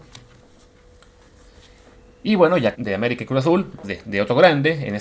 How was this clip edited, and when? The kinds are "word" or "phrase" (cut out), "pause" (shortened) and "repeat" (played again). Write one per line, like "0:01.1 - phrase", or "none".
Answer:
0:02.7 - phrase
0:03.8 - word

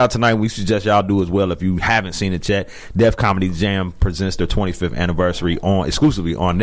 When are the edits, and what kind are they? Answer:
none

